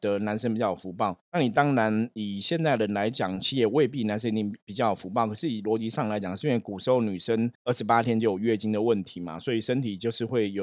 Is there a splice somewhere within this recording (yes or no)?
yes